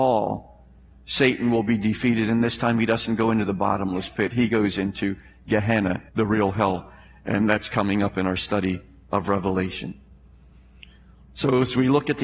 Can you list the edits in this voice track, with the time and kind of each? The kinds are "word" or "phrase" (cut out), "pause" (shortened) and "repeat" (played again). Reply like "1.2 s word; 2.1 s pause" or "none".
6.1 s pause

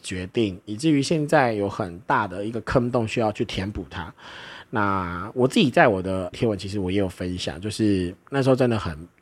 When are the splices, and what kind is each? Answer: 6.3 s word

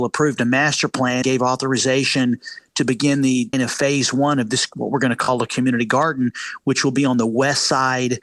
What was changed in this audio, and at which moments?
1.2 s word; 3.5 s phrase

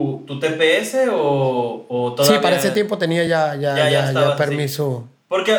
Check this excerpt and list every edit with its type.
none

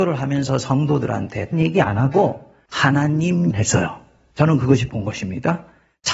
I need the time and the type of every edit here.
1.5 s word; 3.5 s word; 4.9 s word

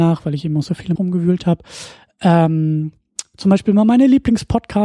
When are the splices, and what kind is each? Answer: 1.0 s word

